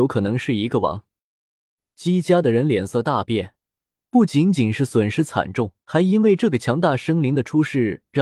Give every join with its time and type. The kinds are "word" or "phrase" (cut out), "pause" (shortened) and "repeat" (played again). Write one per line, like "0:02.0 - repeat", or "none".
0:05.8 - pause